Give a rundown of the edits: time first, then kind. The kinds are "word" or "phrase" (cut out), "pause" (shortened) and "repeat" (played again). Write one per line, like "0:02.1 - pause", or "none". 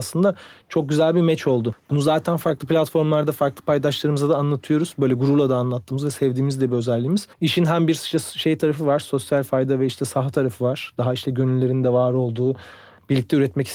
0:07.3 - pause